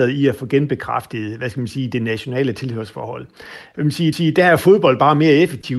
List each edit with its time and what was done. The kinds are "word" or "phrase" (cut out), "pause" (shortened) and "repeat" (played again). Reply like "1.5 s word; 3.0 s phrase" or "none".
4.1 s repeat